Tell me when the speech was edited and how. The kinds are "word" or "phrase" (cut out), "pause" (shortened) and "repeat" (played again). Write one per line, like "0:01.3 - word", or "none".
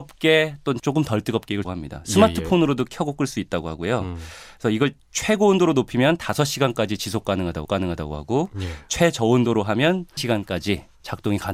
0:01.6 - phrase
0:07.6 - repeat
0:10.2 - phrase